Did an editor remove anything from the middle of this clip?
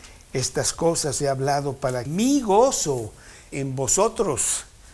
yes; 3 cuts; at 1.2 s, 2.1 s, 3.5 s

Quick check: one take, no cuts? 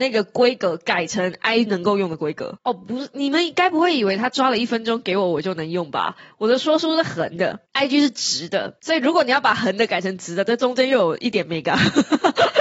no; 1 cut; at 1.7 s

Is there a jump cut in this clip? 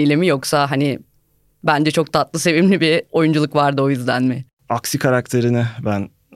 no; 0 cuts

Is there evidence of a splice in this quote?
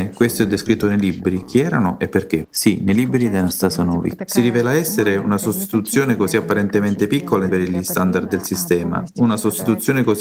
yes; 1 cut; at 7.5 s

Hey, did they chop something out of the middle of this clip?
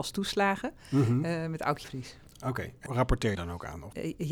yes; 3 cuts; at 1.8 s, 2.9 s, 3.3 s

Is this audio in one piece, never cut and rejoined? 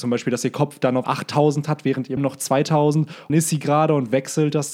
no; 3 cuts; at 1.0 s, 2.2 s, 3.3 s

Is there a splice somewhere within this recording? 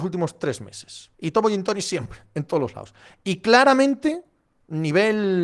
yes; 1 cut; at 1.1 s

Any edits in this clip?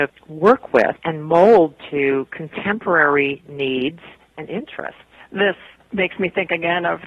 no; 0 cuts

